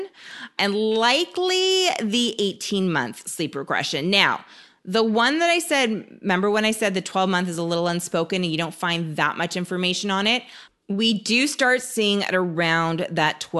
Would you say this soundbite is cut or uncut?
uncut